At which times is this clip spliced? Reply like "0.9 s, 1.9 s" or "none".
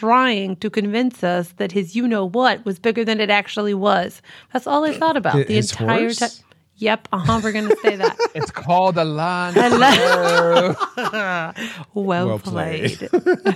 none